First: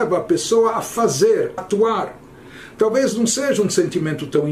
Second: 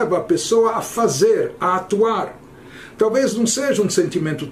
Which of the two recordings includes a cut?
first; 1 cut; at 1.6 s

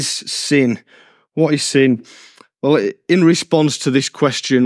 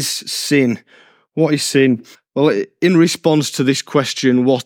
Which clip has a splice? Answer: second; 1 cut; at 2.1 s

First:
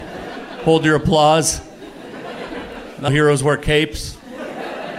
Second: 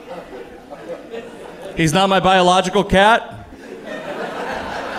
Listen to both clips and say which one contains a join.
first; 1 cut; at 3.1 s

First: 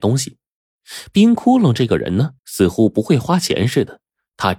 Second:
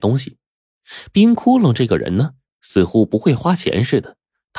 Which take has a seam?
first; 1 cut; at 2.4 s

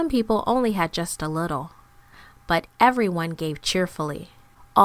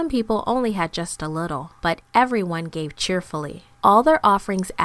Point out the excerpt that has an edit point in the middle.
second; 2 cuts; at 1.8 s, 3.7 s

